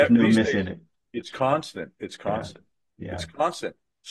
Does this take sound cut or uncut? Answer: uncut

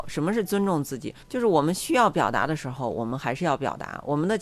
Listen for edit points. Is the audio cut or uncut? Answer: cut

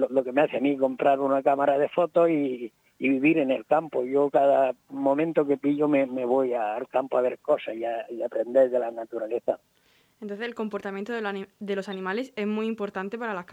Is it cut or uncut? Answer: uncut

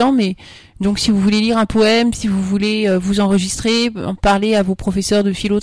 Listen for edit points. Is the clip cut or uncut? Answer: uncut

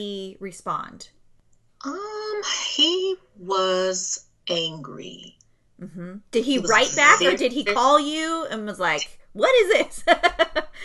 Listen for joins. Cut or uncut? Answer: uncut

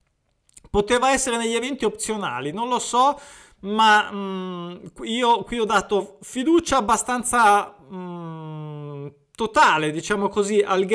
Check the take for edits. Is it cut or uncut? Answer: uncut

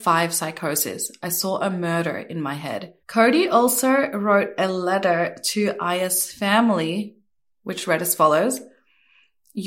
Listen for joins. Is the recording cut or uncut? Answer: cut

